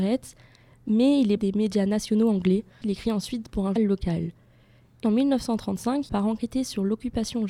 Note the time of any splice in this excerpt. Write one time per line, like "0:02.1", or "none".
0:01.4
0:02.8
0:03.8
0:05.0
0:06.1